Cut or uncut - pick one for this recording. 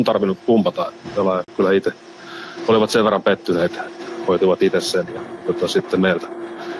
uncut